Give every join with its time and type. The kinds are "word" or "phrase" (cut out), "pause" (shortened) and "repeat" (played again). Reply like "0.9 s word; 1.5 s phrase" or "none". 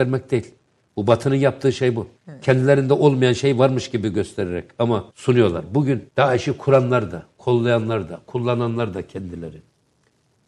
2.2 s pause; 5.1 s pause; 6.1 s pause